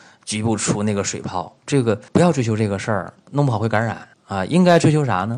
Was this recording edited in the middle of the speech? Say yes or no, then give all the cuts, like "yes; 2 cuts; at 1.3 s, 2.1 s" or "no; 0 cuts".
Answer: yes; 3 cuts; at 1.6 s, 2.1 s, 4.1 s